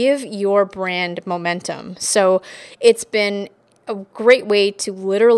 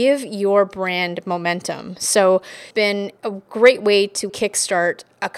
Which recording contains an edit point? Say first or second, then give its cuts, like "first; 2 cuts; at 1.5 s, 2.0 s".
second; 3 cuts; at 2.7 s, 3.2 s, 4.3 s